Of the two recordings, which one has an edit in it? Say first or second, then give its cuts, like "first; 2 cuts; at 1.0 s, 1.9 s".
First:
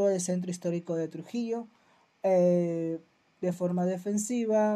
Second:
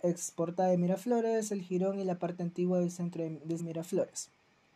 second; 1 cut; at 3.6 s